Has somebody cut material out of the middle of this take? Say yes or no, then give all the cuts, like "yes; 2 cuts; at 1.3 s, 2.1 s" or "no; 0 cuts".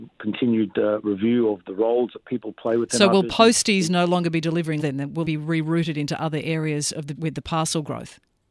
yes; 3 cuts; at 4.8 s, 5.2 s, 7.1 s